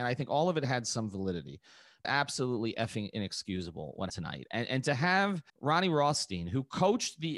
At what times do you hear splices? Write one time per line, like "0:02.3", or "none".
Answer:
0:02.0
0:04.1
0:05.5